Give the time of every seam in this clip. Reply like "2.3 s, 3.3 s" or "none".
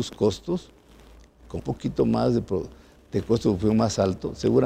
1.6 s